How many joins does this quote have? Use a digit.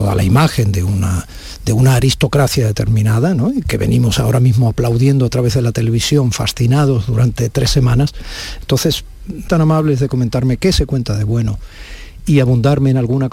1